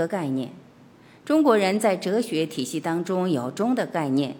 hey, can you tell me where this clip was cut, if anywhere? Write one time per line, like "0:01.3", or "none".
none